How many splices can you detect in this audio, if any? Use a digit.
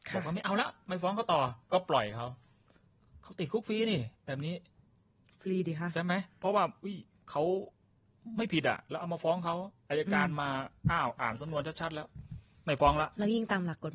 1